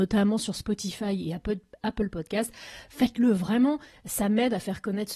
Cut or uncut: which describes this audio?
uncut